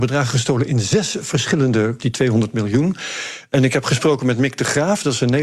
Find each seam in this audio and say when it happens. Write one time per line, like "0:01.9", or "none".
0:02.0